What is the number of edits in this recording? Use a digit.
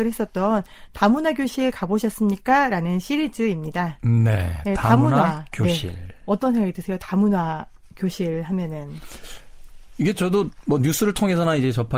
0